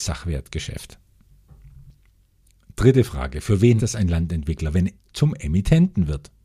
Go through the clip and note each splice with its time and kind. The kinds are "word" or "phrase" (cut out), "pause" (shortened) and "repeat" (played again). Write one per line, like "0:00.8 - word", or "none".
0:03.8 - word
0:05.0 - word